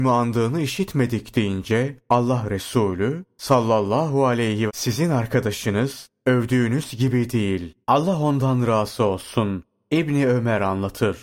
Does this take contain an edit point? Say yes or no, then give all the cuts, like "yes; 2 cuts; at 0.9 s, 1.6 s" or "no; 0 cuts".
yes; 3 cuts; at 2.0 s, 4.7 s, 7.8 s